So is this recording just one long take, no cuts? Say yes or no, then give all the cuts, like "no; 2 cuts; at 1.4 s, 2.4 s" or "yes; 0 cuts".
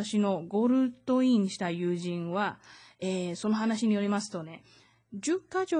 yes; 0 cuts